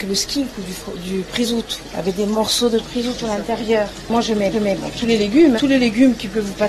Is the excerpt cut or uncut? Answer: cut